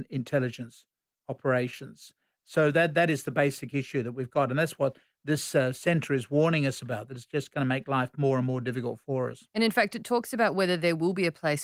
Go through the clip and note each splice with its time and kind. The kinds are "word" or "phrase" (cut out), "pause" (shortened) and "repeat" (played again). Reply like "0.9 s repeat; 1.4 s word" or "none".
none